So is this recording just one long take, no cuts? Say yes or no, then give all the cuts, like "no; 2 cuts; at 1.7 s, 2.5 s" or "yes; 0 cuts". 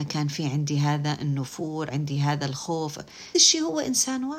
no; 2 cuts; at 1.9 s, 3.3 s